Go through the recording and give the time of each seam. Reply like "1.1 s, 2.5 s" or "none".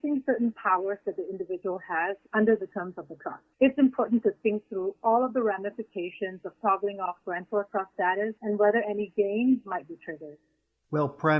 2.2 s, 3.5 s, 8.4 s